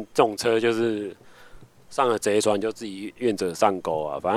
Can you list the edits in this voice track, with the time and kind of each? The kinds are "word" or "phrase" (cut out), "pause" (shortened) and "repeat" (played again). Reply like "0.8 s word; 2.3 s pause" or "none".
none